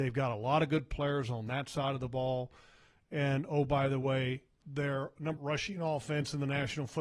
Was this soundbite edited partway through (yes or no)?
yes